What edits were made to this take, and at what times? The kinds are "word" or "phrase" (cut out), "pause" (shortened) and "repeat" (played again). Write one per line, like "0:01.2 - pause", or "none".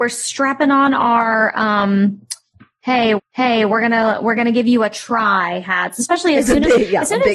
0:03.2 - repeat